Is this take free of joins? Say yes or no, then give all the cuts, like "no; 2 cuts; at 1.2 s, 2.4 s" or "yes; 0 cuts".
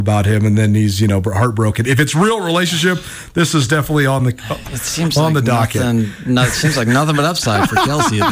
yes; 0 cuts